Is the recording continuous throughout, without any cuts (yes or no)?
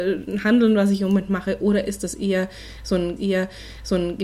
no